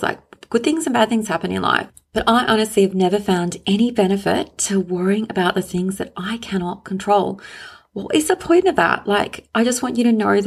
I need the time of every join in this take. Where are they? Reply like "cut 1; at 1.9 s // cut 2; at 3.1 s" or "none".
none